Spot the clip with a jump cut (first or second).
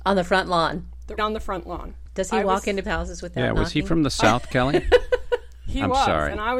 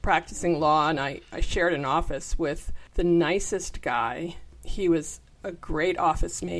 first